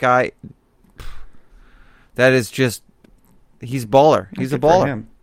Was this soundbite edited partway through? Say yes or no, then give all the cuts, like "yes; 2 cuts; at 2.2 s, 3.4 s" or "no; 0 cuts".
no; 0 cuts